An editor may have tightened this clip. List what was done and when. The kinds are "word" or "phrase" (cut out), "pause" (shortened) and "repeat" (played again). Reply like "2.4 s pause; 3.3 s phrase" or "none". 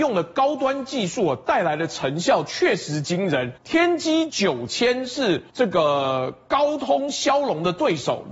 3.6 s pause; 5.5 s pause

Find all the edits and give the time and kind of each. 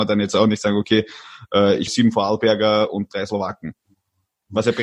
1.9 s word

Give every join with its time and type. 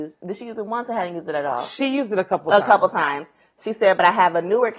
none

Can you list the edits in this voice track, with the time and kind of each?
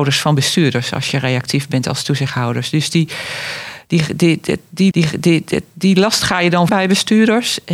4.9 s repeat; 6.7 s word

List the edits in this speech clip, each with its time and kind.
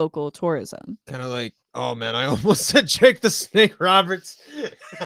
1.0 s pause; 1.6 s pause

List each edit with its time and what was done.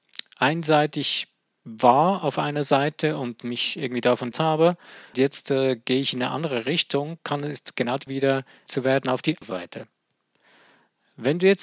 4.3 s word; 5.1 s word; 8.1 s word; 8.7 s word; 9.4 s word

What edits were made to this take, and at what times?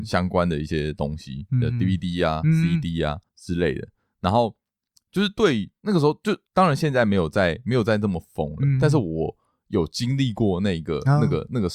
3.3 s pause; 6.5 s pause

